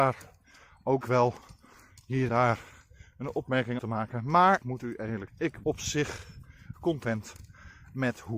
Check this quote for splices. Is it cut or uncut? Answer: cut